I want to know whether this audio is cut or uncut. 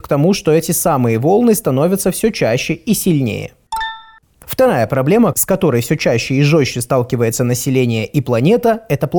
uncut